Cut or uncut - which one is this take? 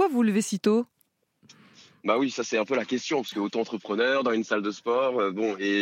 uncut